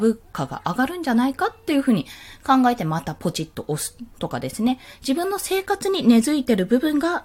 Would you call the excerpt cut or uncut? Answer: uncut